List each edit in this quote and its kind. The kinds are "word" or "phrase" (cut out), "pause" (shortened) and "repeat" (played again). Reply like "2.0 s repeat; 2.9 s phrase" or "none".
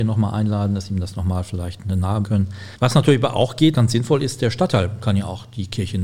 2.2 s word; 3.7 s word